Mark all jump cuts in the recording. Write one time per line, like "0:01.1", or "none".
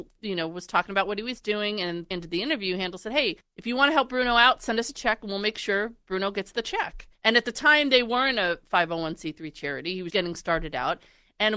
0:02.1
0:03.4
0:07.2
0:10.1